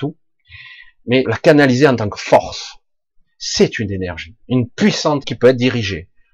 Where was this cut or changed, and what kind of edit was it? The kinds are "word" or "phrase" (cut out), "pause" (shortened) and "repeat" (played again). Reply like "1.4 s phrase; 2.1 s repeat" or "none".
1.2 s word; 4.4 s pause; 5.2 s word